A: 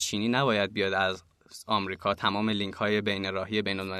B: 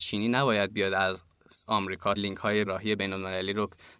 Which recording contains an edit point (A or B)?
B